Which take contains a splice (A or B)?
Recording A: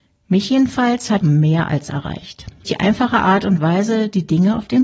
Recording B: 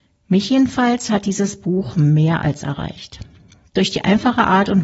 A